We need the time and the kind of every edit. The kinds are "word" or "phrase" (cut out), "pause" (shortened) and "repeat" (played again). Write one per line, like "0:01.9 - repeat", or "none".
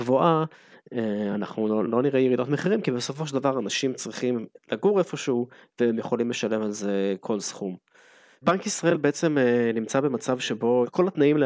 0:01.9 - word